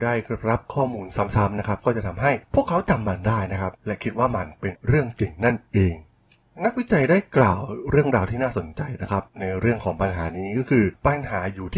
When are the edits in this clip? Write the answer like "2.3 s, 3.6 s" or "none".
3.7 s, 9.3 s